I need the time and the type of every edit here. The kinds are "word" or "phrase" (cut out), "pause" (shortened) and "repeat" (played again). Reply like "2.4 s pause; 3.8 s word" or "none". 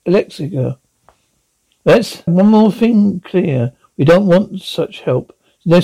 2.3 s word

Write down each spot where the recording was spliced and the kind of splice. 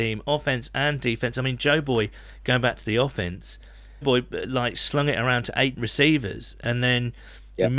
4.0 s word; 5.8 s word

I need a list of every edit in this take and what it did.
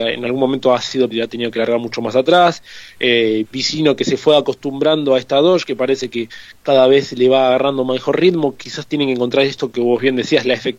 1.1 s word

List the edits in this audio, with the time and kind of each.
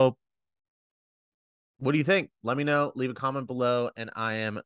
none

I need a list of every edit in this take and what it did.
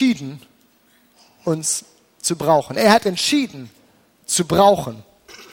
none

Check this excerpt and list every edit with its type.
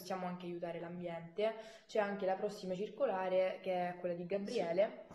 none

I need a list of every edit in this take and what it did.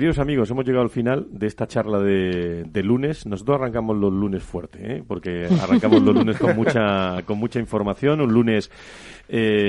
none

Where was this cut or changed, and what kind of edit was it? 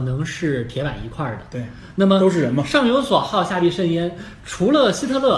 none

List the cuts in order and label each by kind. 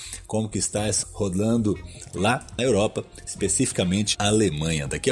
1.0 s word; 2.6 s word; 4.1 s word

